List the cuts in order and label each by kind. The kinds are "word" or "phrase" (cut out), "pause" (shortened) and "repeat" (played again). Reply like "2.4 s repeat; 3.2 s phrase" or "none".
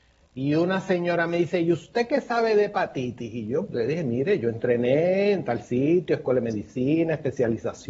3.7 s word

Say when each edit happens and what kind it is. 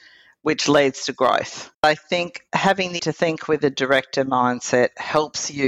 1.7 s pause; 3.0 s word

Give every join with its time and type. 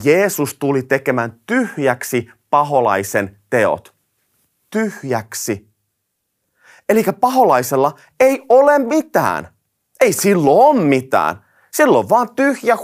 none

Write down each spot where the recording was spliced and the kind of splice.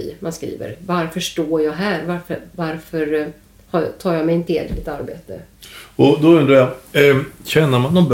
4.5 s word

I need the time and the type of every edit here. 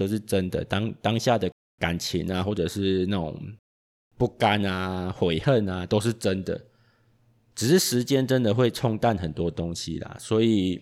none

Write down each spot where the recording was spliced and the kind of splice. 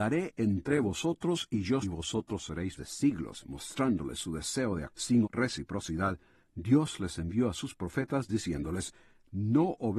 1.8 s phrase; 2.8 s phrase; 4.9 s phrase; 5.2 s word

